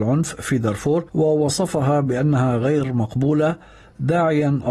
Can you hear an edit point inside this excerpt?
yes; 1 cut; at 1.1 s

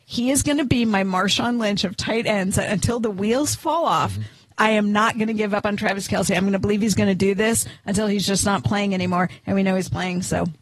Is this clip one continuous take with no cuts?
yes; 0 cuts

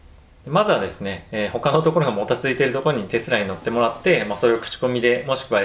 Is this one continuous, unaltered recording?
yes; 0 cuts

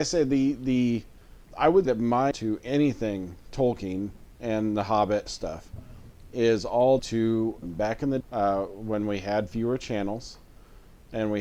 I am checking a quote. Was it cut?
yes; 8 cuts; at 1.4 s, 1.8 s, 2.3 s, 4.3 s, 5.3 s, 7.0 s, 7.6 s, 8.2 s

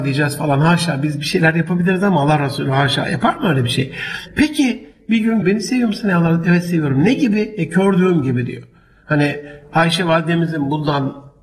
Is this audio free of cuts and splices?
no; 2 cuts; at 3.0 s, 5.4 s

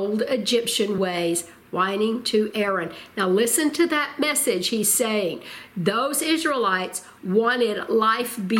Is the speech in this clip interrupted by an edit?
no; 0 cuts

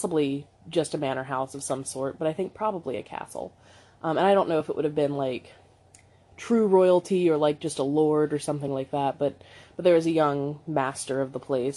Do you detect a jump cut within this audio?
no; 0 cuts

